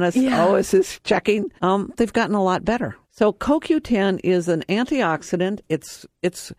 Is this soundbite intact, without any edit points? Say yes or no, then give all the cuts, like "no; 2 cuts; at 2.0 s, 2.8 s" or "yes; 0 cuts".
no; 2 cuts; at 1.6 s, 3.0 s